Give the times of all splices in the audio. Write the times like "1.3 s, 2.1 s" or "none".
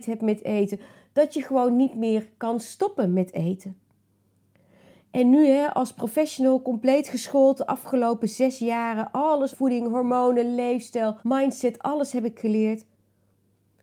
9.5 s, 11.2 s